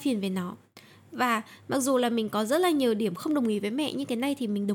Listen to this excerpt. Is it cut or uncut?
uncut